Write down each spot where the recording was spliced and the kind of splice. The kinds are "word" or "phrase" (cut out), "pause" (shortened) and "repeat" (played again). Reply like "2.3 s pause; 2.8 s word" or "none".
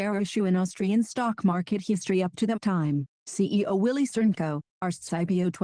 none